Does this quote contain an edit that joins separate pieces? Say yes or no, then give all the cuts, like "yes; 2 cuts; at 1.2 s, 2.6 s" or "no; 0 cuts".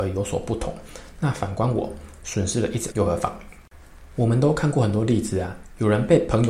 yes; 1 cut; at 2.9 s